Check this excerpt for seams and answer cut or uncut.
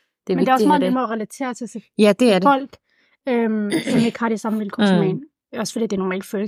uncut